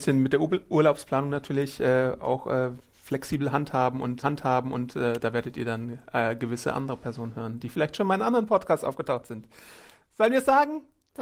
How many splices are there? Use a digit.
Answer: 1